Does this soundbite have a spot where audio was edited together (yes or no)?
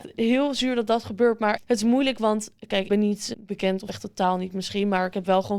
yes